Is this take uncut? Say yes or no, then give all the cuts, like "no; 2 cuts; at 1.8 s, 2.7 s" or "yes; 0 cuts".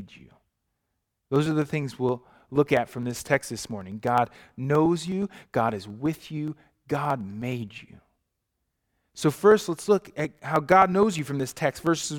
yes; 0 cuts